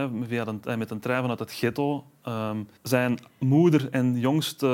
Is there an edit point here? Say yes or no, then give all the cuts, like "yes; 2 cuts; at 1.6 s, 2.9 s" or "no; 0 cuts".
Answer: yes; 1 cut; at 2.8 s